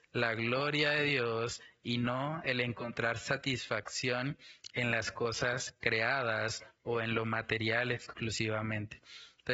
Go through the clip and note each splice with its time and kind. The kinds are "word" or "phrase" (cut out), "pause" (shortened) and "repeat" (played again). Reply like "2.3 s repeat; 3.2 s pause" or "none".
none